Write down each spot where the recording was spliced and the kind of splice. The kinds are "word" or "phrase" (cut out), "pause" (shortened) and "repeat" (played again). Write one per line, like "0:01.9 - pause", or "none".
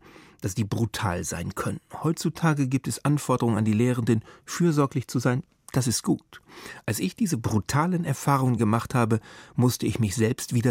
none